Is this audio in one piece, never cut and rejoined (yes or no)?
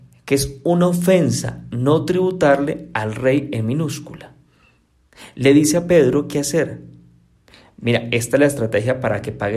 yes